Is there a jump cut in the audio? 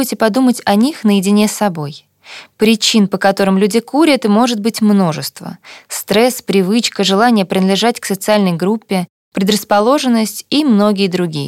no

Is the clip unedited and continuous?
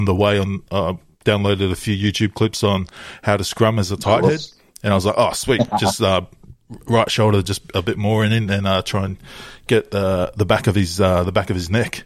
yes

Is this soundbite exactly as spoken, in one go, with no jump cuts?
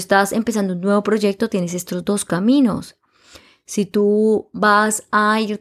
yes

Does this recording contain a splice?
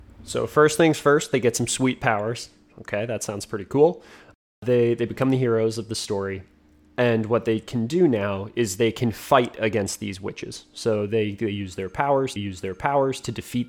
yes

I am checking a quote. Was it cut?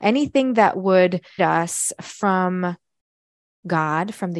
yes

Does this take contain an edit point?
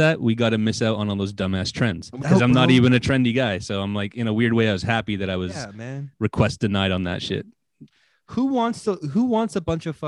yes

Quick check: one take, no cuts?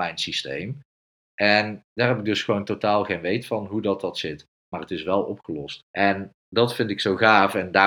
no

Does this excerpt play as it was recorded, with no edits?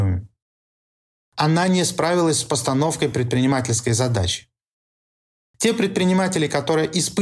yes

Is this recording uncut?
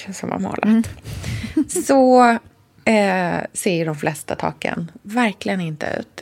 yes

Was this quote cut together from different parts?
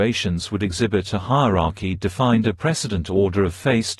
no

